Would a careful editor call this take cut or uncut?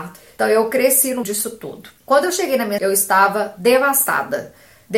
cut